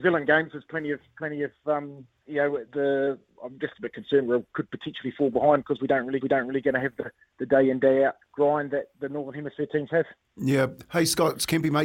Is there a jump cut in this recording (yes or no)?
yes